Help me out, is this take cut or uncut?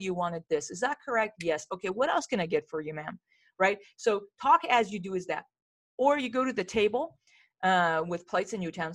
uncut